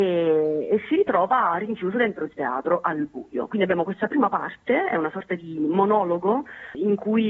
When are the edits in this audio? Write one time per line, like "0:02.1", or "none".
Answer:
none